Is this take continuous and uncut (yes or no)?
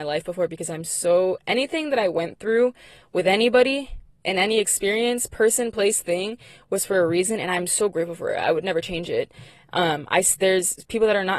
yes